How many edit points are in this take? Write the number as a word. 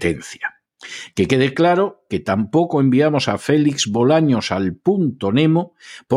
zero